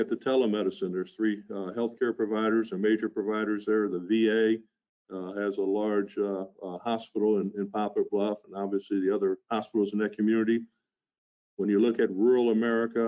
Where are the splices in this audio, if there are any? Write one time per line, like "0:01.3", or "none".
0:09.4